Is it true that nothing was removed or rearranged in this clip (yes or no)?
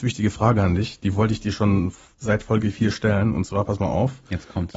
no